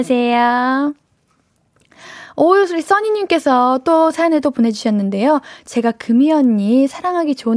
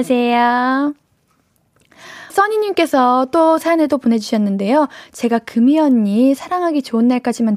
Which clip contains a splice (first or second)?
second